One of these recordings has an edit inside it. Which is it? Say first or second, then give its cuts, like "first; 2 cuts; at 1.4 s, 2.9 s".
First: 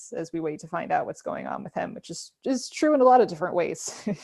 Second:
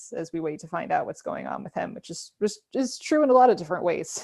first; 1 cut; at 2.4 s